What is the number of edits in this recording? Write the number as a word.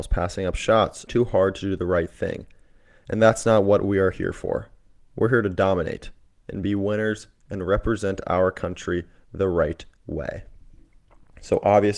one